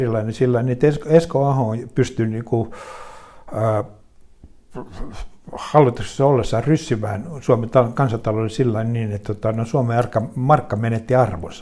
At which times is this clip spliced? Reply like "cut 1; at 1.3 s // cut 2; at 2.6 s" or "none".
none